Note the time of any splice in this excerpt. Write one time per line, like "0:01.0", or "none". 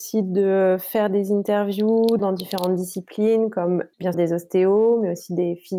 0:02.2
0:04.1

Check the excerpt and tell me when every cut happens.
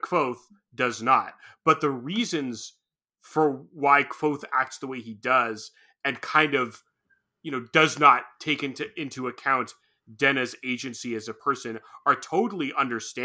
none

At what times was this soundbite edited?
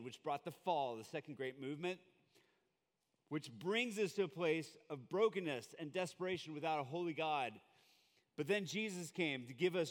none

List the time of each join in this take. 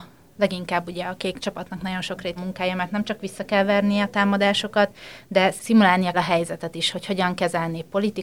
0:02.4
0:06.1

